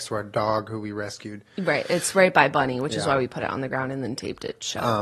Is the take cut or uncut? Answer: uncut